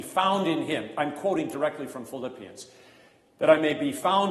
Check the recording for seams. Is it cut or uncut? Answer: uncut